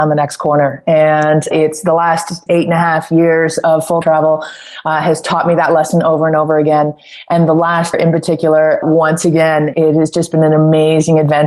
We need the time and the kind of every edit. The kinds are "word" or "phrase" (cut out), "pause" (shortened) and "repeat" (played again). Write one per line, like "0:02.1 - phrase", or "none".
0:01.5 - word
0:02.5 - word
0:04.0 - word
0:07.9 - word
0:08.8 - word
0:09.7 - word